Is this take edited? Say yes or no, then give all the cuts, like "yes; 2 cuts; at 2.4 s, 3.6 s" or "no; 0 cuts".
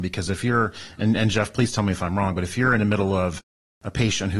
no; 0 cuts